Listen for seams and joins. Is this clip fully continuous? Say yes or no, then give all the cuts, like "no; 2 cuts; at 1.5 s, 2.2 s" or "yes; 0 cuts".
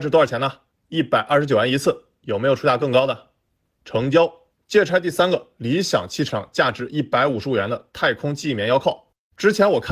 no; 1 cut; at 6.3 s